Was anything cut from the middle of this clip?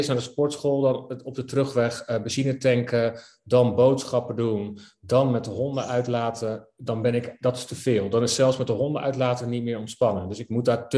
no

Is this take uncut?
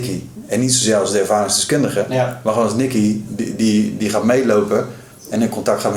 yes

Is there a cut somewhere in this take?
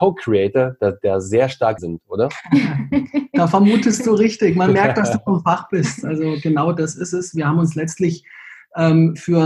yes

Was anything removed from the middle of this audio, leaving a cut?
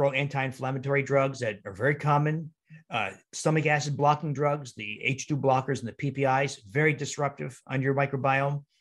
no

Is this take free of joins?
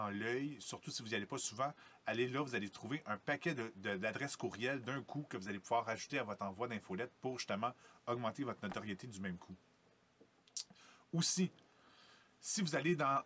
yes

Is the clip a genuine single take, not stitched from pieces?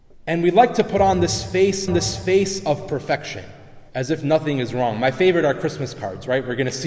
no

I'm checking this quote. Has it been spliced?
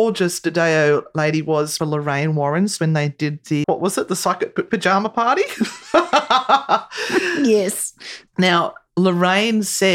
yes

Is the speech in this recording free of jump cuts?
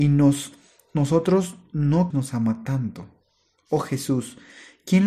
no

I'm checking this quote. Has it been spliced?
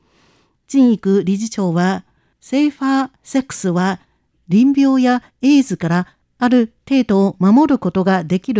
no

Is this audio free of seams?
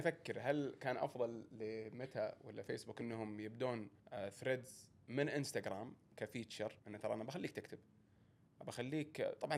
no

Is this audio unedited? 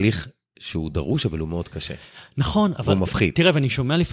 yes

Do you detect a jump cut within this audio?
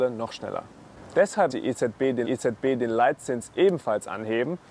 yes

